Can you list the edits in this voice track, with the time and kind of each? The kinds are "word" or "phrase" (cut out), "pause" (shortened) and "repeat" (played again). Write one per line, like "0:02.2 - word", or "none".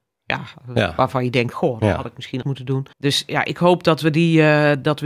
0:02.4 - word
0:02.9 - pause